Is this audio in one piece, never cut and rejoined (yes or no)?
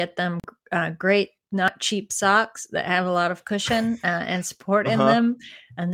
yes